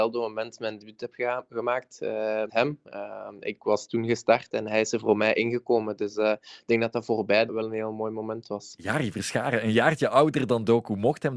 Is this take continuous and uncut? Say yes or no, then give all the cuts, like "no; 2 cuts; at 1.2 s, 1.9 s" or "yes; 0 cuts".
no; 2 cuts; at 2.5 s, 7.5 s